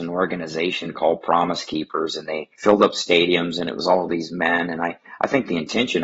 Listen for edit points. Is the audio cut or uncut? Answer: cut